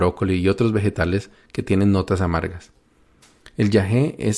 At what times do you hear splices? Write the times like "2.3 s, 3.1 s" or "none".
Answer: none